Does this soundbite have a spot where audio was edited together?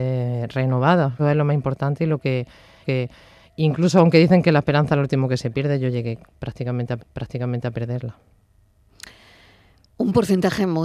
yes; 3 cuts; at 1.2 s, 2.8 s, 7.0 s

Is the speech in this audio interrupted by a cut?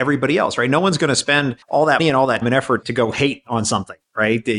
yes; 4 cuts; at 1.6 s, 2.0 s, 2.4 s, 2.8 s

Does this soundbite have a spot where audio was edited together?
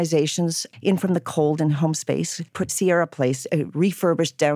yes; 1 cut; at 2.7 s

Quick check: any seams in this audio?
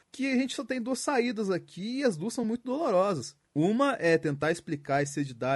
no; 0 cuts

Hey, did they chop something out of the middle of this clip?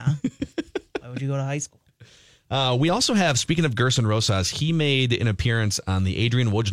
no; 0 cuts

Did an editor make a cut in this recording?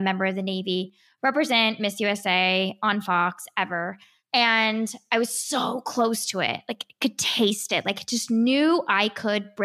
no; 0 cuts

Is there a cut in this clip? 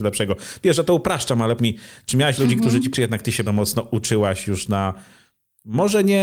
yes; 3 cuts; at 1.6 s, 2.9 s, 3.5 s

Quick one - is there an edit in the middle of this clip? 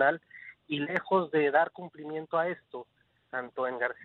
no; 0 cuts

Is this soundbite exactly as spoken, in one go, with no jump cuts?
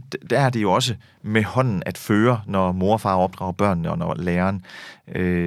yes; 0 cuts

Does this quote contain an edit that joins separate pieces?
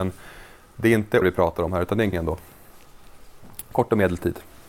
yes; 2 cuts; at 1.2 s, 2.1 s

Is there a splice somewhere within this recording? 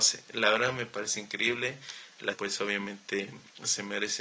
yes; 1 cut; at 2.3 s

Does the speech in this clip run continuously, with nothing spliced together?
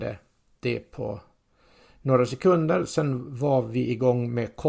yes; 0 cuts

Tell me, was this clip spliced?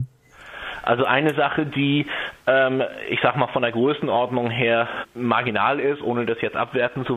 no; 0 cuts

